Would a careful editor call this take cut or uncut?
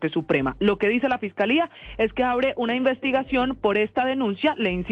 uncut